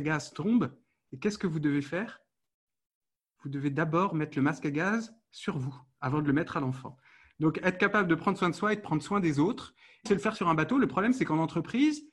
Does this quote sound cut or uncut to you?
cut